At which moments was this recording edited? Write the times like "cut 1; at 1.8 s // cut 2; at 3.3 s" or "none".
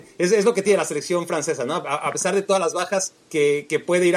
cut 1; at 3.2 s